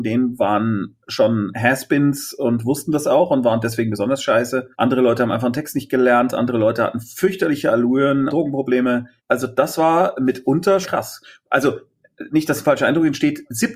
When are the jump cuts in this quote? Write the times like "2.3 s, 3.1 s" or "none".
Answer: 1.0 s, 4.7 s, 8.3 s, 9.2 s, 10.8 s